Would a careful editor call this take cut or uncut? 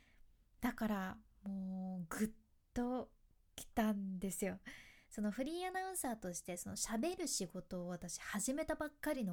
uncut